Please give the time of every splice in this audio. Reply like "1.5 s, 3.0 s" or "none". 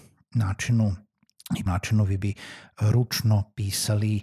1.7 s